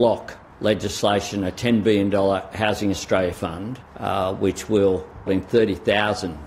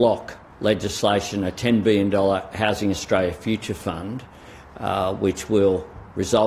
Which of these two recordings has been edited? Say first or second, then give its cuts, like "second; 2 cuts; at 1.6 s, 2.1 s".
first; 3 cuts; at 3.3 s, 3.9 s, 5.3 s